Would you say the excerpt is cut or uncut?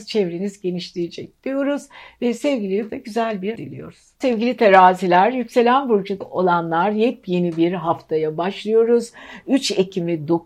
cut